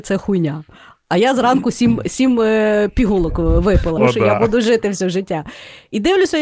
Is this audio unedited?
no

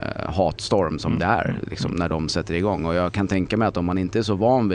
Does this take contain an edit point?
no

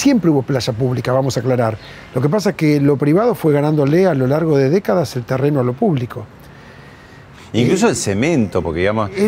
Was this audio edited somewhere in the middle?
no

